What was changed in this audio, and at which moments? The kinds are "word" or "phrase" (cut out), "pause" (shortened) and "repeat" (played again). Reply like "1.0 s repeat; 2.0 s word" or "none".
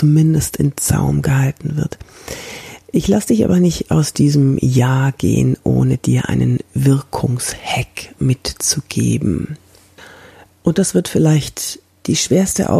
none

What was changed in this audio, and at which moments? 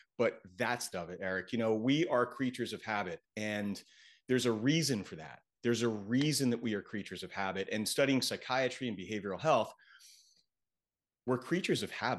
0.9 s word

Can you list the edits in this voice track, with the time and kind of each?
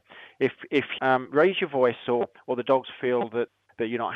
1.0 s word

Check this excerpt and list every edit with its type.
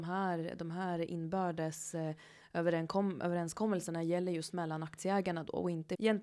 none

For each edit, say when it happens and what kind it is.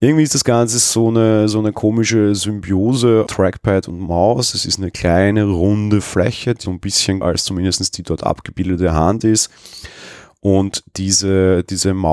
3.3 s word; 6.7 s word; 7.2 s word

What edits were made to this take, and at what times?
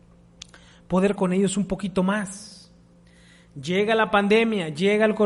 1.2 s word

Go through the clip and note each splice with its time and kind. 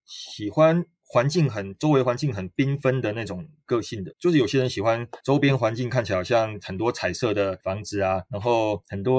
4.1 s word

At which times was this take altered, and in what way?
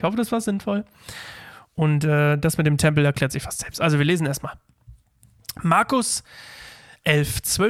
none

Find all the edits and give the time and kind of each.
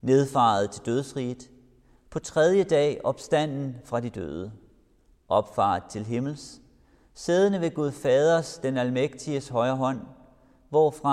none

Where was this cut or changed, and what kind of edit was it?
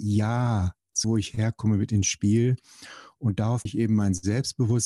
1.0 s word; 3.7 s word

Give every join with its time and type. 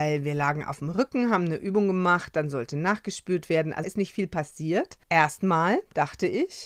3.8 s word; 5.0 s pause

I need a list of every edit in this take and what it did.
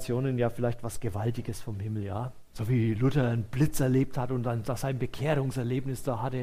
2.5 s pause

